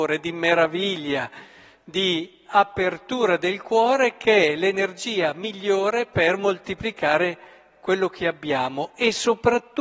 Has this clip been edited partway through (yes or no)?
no